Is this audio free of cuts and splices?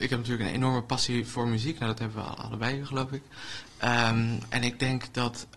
yes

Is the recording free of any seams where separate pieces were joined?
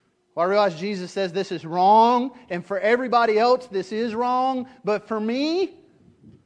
yes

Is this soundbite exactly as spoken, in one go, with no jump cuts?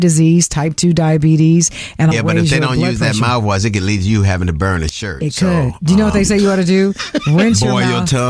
no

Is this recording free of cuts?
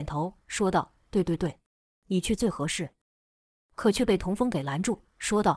yes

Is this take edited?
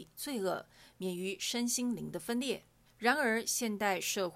yes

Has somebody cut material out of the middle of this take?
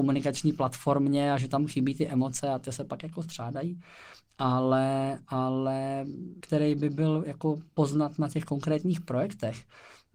yes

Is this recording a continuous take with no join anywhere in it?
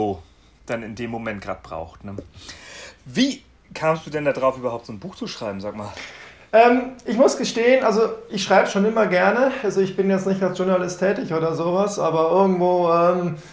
yes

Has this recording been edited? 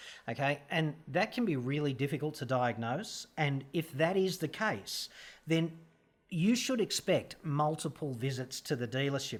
no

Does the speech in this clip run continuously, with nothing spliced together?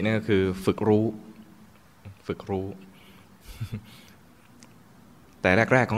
yes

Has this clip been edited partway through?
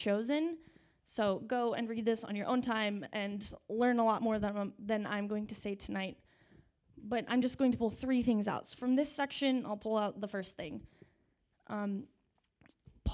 no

